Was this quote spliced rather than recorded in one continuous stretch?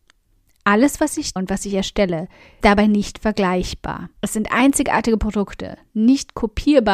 yes; 3 cuts; at 1.4 s, 2.6 s, 4.2 s

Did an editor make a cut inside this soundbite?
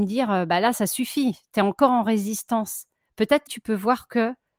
yes; 1 cut; at 3.5 s

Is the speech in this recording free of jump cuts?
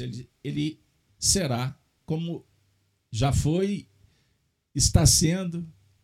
yes; 0 cuts

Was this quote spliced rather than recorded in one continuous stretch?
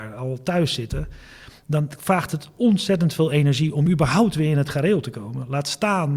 no; 0 cuts

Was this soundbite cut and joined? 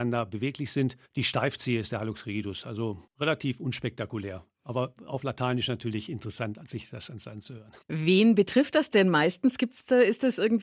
yes; 3 cuts; at 1.1 s, 3.1 s, 7.8 s

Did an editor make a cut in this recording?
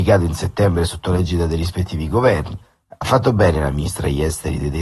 no; 0 cuts

